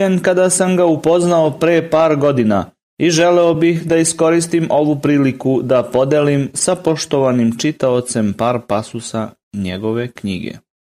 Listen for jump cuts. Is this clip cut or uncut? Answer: uncut